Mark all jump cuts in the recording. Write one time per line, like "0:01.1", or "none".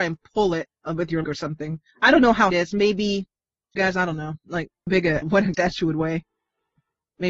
0:01.2
0:01.9
0:02.5
0:03.8
0:04.9
0:05.2
0:05.5